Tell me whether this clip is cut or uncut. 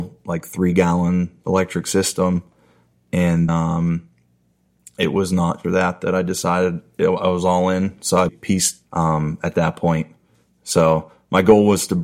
cut